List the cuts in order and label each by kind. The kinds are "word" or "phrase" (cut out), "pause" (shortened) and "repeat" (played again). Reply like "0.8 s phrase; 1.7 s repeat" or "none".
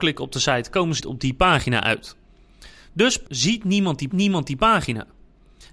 1.0 s word; 3.3 s word; 4.1 s repeat